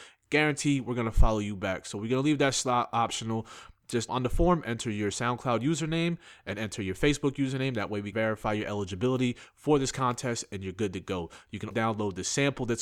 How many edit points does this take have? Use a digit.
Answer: 3